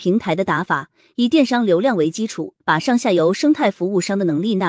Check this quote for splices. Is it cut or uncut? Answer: cut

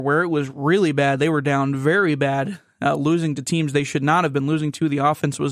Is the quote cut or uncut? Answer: uncut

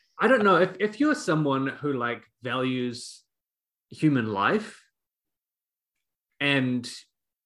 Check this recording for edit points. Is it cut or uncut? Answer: uncut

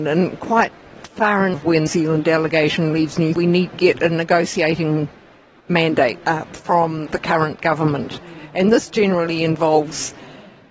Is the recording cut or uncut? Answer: cut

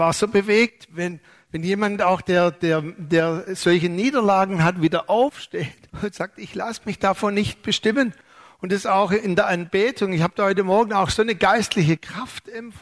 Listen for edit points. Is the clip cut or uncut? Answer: cut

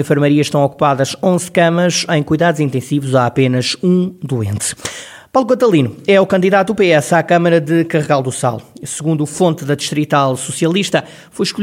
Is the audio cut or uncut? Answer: uncut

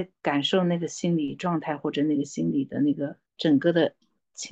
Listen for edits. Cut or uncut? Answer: cut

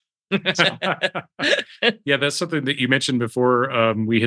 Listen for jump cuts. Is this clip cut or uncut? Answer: uncut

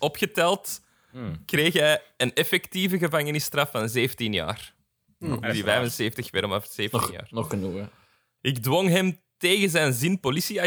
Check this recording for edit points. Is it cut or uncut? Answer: uncut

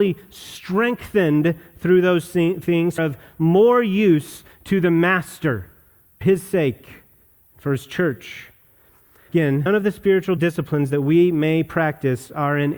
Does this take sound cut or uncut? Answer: cut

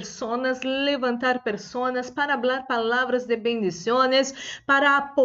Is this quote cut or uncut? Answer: uncut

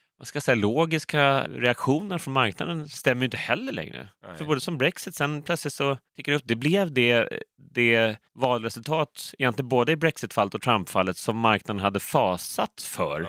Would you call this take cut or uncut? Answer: cut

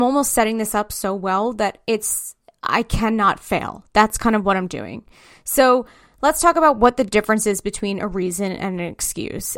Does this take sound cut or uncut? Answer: uncut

